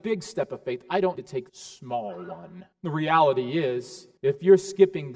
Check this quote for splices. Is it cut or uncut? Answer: cut